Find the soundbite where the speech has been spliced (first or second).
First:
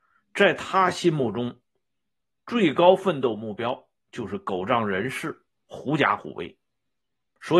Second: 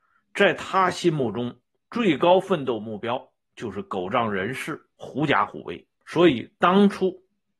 second